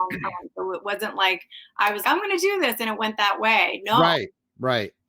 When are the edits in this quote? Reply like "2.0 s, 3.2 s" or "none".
2.0 s